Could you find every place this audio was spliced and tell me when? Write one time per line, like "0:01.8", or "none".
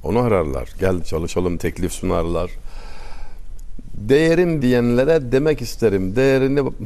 0:01.0
0:01.6
0:04.6